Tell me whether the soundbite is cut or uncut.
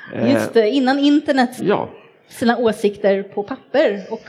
cut